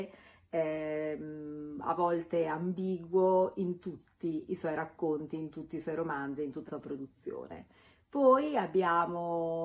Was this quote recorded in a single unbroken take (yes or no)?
no